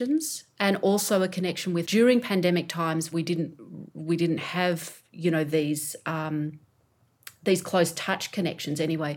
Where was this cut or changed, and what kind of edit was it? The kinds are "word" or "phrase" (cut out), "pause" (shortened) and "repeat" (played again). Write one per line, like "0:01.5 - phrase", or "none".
0:01.8 - word
0:03.1 - word